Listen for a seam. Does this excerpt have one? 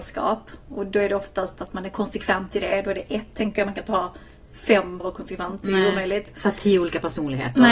yes; 1 cut; at 5.0 s

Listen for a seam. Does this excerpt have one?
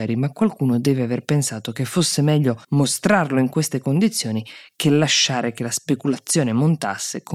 yes; 1 cut; at 2.6 s

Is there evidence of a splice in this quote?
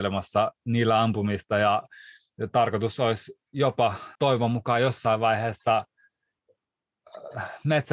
yes; 1 cut; at 4.1 s

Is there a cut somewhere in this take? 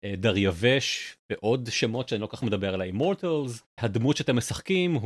yes; 2 cuts; at 2.4 s, 3.8 s

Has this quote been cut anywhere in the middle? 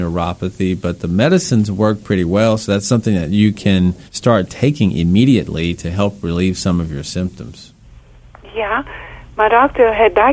yes; 1 cut; at 4.1 s

